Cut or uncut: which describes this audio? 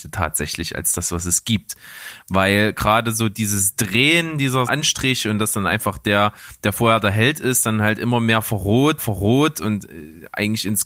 cut